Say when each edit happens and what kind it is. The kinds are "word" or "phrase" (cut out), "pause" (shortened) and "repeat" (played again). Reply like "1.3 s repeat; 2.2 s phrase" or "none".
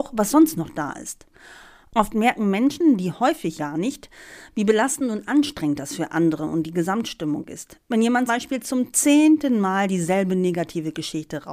3.6 s word; 8.3 s word